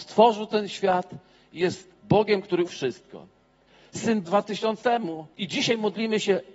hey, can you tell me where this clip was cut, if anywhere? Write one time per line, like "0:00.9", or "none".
0:01.9
0:02.7
0:04.2
0:04.8
0:05.3